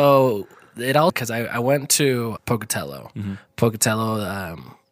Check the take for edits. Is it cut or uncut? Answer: cut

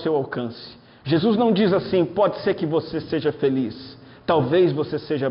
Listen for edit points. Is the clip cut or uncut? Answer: uncut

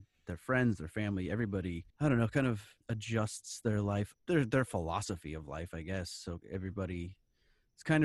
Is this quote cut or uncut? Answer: cut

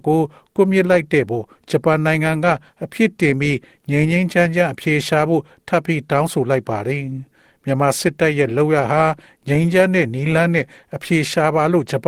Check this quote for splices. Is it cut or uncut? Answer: uncut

